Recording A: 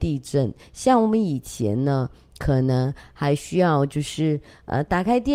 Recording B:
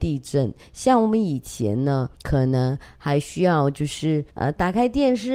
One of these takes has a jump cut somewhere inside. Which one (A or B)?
B